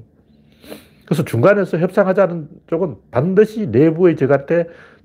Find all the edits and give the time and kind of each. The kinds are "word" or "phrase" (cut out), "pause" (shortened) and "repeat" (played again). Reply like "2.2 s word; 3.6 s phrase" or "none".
none